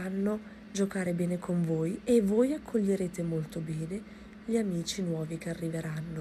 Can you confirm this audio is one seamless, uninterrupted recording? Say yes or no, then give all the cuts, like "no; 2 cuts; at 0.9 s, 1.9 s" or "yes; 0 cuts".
yes; 0 cuts